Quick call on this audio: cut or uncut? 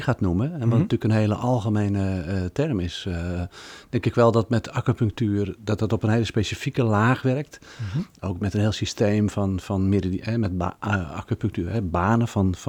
uncut